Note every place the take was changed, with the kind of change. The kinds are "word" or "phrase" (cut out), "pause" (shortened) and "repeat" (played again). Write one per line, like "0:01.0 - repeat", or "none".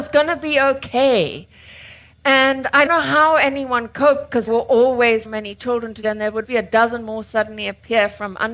0:02.9 - word
0:04.5 - word
0:05.2 - word
0:06.0 - word
0:06.4 - word